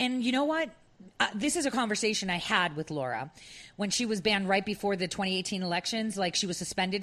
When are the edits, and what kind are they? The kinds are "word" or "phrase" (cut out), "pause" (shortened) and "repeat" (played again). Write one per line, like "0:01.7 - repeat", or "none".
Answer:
none